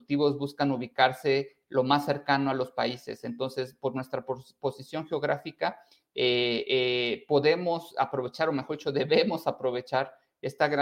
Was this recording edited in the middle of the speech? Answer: no; 0 cuts

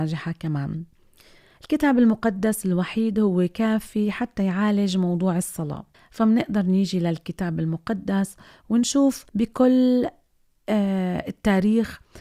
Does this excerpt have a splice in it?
yes; 2 cuts; at 5.9 s, 9.3 s

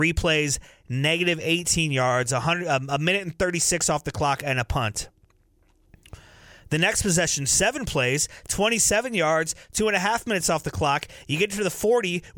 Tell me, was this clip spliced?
no; 0 cuts

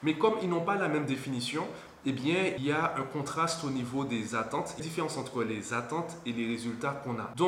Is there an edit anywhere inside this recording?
yes; 2 cuts; at 2.6 s, 4.8 s

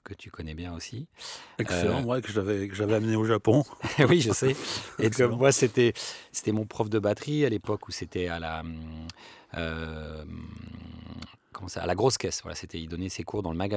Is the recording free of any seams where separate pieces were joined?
no; 1 cut; at 5.1 s

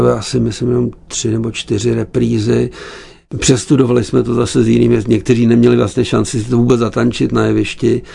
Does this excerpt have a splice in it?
no; 0 cuts

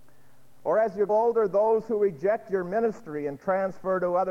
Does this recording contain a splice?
yes; 1 cut; at 1.1 s

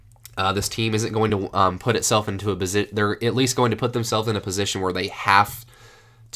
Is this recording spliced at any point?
no; 0 cuts

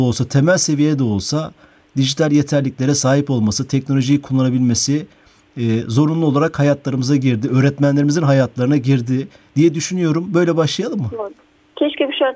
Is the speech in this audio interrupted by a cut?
no; 0 cuts

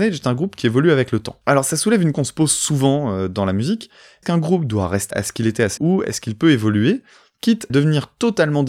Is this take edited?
yes; 5 cuts; at 2.1 s, 4.2 s, 5.1 s, 5.8 s, 7.7 s

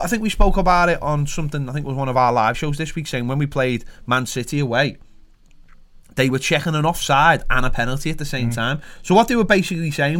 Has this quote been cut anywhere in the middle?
no; 0 cuts

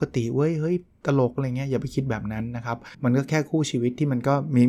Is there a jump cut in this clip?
yes; 1 cut; at 2.9 s

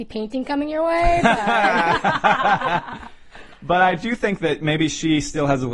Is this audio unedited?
yes; 0 cuts

